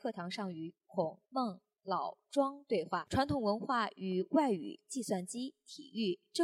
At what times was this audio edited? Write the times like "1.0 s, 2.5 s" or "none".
1.2 s